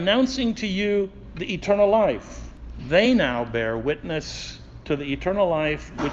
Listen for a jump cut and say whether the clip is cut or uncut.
uncut